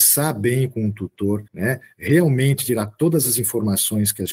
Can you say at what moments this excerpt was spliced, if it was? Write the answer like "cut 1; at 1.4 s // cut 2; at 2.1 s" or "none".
cut 1; at 1.5 s